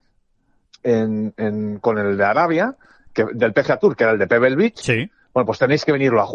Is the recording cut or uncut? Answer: uncut